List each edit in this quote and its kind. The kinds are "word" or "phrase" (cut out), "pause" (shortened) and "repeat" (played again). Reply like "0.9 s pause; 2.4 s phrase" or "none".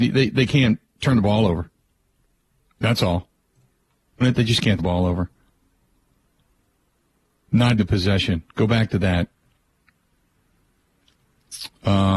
4.2 s phrase; 4.8 s word; 7.8 s word